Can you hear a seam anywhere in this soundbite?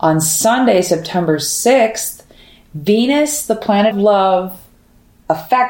yes; 1 cut; at 3.9 s

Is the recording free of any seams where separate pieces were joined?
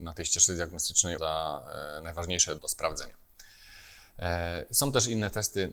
no; 2 cuts; at 1.2 s, 2.6 s

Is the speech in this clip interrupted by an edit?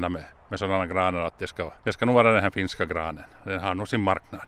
yes; 1 cut; at 1.8 s

